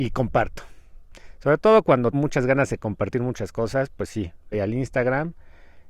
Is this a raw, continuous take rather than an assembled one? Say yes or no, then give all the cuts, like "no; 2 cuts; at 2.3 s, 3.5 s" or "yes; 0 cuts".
no; 2 cuts; at 2.1 s, 4.5 s